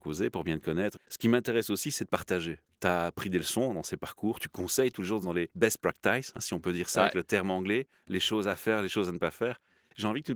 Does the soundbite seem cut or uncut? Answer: cut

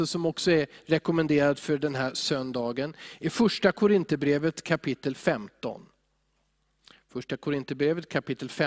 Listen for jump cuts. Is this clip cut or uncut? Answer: uncut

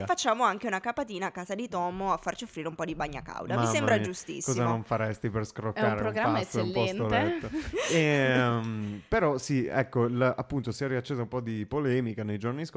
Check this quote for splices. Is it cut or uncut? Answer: uncut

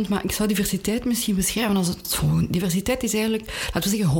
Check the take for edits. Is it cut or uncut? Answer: cut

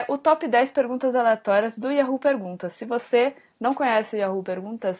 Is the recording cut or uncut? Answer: uncut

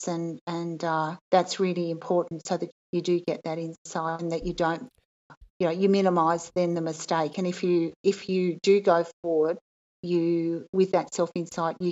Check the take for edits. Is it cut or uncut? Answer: cut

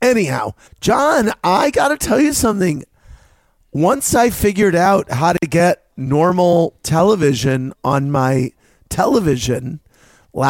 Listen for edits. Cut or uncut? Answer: uncut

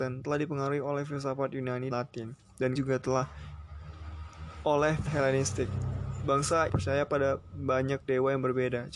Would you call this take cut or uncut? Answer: cut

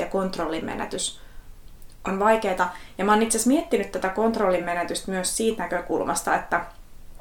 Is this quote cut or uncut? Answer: uncut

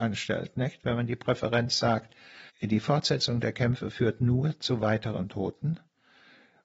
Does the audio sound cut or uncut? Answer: cut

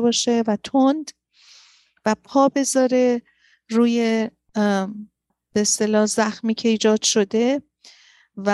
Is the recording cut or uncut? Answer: uncut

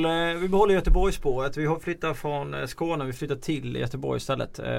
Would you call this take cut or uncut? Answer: uncut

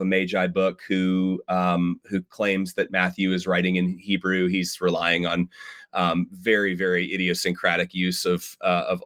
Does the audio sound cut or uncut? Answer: uncut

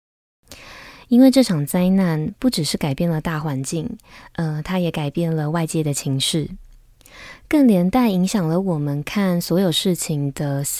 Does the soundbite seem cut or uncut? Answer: uncut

